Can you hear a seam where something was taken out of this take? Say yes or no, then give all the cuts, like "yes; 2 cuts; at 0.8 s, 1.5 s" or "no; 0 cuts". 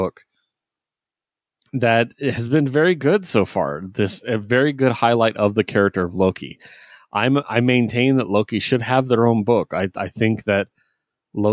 no; 0 cuts